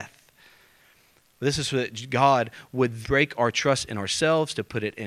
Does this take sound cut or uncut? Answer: cut